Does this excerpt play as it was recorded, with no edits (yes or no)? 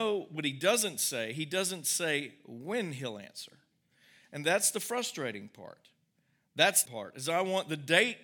no